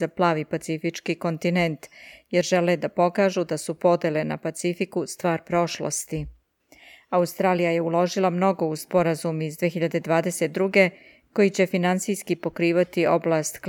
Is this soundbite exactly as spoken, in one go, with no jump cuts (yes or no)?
yes